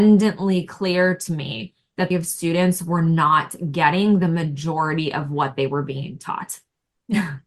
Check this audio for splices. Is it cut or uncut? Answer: cut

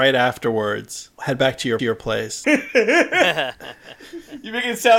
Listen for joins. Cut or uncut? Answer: cut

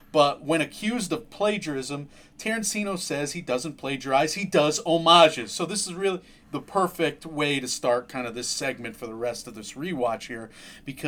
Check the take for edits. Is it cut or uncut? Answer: uncut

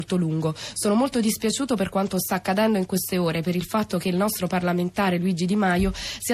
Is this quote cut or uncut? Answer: uncut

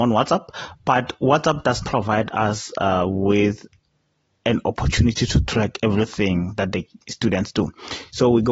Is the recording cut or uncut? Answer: cut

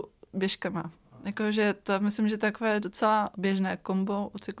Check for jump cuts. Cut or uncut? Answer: cut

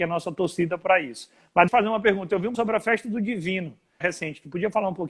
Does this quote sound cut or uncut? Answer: cut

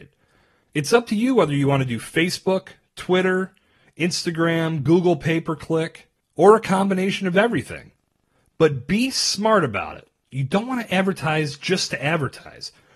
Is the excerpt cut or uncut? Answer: uncut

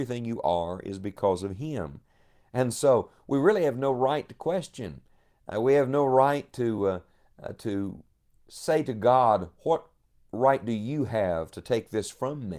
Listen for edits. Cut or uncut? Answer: uncut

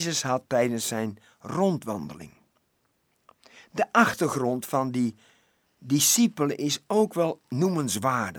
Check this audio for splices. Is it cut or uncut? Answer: uncut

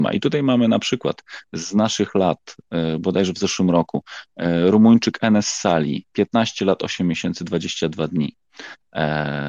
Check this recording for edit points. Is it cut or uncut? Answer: uncut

